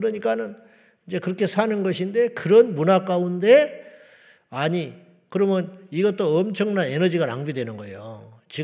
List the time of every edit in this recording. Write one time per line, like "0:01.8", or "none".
none